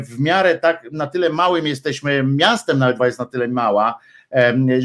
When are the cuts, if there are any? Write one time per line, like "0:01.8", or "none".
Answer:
0:03.0